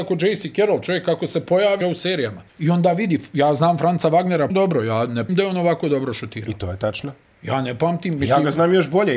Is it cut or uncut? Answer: cut